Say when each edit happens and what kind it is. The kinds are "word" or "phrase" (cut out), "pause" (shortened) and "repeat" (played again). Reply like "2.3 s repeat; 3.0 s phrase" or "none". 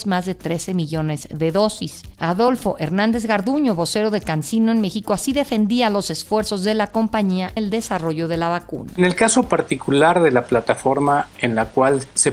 7.6 s word